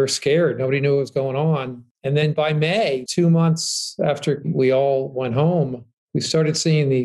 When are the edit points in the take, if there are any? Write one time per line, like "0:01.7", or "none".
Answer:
0:03.1